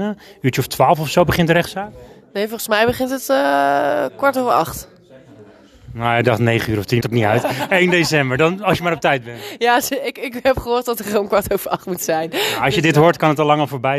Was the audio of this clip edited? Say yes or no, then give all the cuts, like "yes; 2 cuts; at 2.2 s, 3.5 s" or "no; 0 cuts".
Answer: yes; 1 cut; at 7.0 s